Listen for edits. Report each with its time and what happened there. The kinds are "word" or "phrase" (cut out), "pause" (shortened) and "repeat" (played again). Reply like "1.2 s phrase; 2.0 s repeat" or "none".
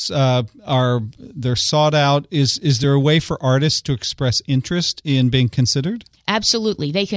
none